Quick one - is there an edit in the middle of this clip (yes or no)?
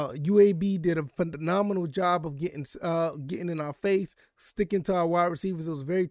no